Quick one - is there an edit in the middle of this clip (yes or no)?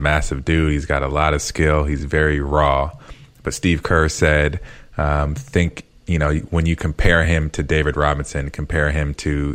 no